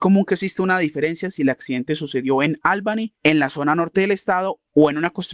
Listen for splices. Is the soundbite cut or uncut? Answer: uncut